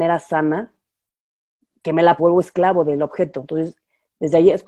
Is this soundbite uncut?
no; 1 cut; at 2.2 s

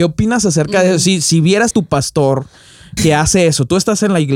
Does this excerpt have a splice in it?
yes; 2 cuts; at 1.7 s, 3.0 s

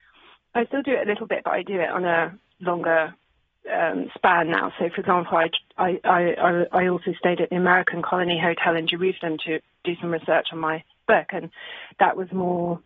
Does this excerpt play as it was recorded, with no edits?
yes; 0 cuts

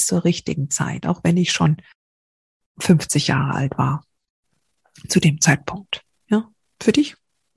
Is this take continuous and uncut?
yes; 0 cuts

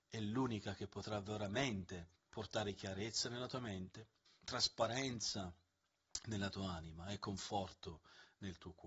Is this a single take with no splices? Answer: no; 2 cuts; at 2.2 s, 4.3 s

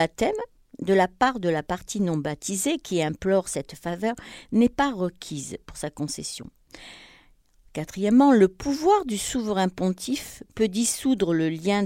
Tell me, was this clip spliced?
no; 0 cuts

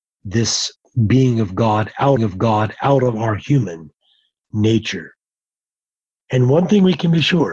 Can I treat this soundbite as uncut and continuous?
no; 1 cut; at 2.2 s

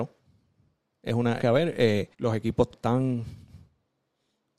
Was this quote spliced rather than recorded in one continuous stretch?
yes; 3 cuts; at 1.4 s, 2.1 s, 2.7 s

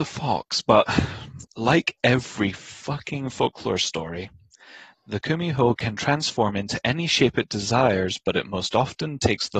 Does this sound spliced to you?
no; 0 cuts

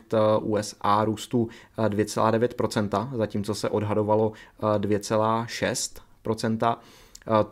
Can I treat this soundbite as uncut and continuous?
yes; 0 cuts

